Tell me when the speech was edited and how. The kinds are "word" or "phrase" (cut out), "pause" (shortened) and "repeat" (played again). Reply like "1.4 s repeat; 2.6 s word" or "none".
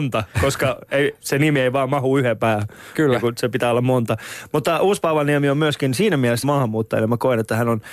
1.2 s word; 2.4 s word; 6.4 s word